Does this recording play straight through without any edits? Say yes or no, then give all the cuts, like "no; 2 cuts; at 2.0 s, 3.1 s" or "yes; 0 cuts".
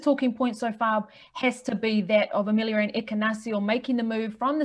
yes; 0 cuts